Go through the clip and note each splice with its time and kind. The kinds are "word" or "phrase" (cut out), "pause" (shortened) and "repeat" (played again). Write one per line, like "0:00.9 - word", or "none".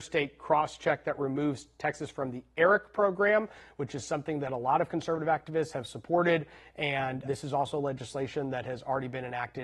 0:07.2 - word